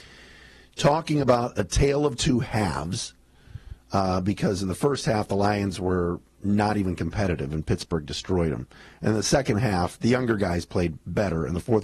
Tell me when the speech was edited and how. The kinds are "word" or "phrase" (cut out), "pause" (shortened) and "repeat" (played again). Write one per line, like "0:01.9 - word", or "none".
none